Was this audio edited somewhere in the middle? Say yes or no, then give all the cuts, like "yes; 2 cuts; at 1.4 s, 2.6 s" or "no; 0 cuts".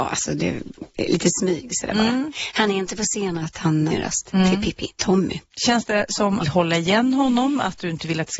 yes; 4 cuts; at 3.4 s, 3.9 s, 5.0 s, 6.4 s